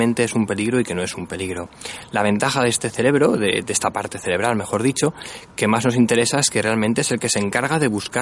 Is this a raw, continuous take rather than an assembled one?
yes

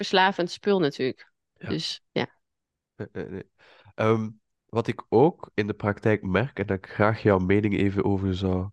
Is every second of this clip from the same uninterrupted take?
no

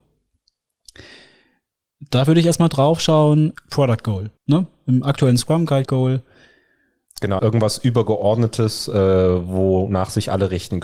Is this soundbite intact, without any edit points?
no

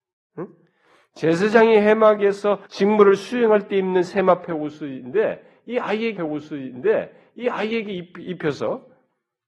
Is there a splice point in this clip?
yes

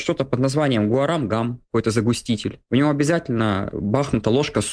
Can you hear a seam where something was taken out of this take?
no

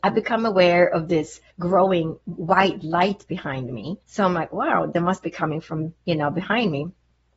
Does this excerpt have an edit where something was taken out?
yes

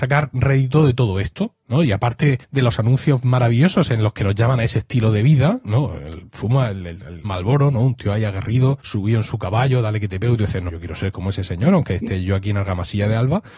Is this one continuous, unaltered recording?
no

